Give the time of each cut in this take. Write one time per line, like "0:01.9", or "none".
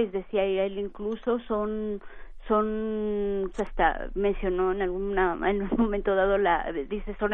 0:03.5